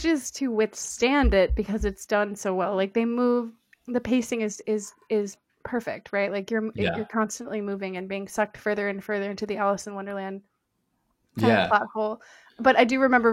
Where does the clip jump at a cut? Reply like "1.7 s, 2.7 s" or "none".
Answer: none